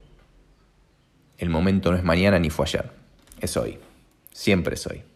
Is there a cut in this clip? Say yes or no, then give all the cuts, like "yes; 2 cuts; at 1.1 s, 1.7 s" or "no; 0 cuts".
no; 0 cuts